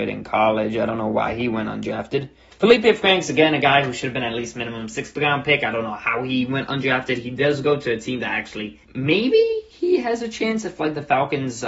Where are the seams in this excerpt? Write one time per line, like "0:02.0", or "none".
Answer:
0:08.8